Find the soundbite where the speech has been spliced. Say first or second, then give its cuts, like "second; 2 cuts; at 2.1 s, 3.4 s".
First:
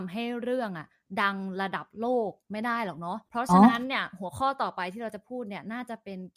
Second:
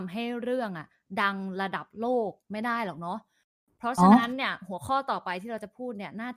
first; 1 cut; at 3.3 s